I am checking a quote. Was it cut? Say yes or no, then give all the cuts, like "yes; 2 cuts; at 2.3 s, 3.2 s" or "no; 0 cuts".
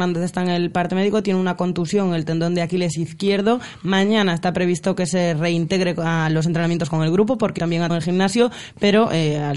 yes; 2 cuts; at 7.6 s, 7.9 s